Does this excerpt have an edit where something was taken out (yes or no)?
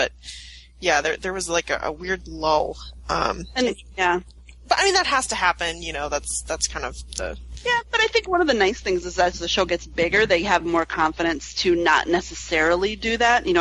no